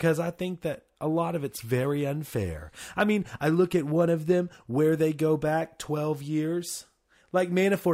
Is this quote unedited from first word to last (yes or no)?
yes